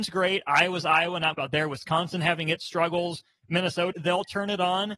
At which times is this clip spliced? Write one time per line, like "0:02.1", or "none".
0:01.3
0:03.9